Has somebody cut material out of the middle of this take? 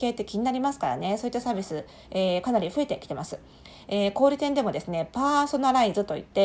no; 0 cuts

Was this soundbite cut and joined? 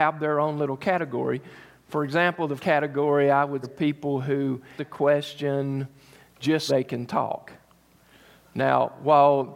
yes; 4 cuts; at 2.6 s, 3.6 s, 4.8 s, 6.7 s

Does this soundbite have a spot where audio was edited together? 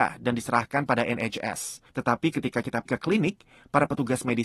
yes; 2 cuts; at 1.9 s, 2.9 s

